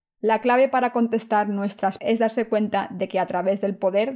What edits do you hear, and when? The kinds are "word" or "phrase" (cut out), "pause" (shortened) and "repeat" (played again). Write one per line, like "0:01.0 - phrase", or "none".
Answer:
0:02.0 - word